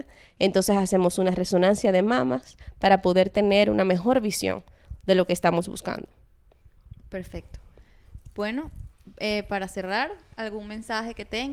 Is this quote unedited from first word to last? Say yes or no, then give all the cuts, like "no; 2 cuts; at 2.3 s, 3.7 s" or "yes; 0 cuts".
yes; 0 cuts